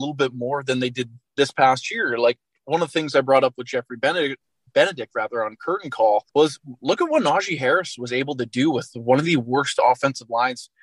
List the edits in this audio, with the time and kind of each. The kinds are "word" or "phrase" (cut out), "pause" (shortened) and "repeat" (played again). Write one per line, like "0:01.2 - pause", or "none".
0:06.3 - pause